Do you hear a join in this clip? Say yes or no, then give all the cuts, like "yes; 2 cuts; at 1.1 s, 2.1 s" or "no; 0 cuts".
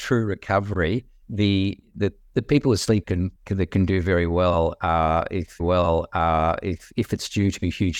yes; 4 cuts; at 1.2 s, 3.0 s, 3.4 s, 5.6 s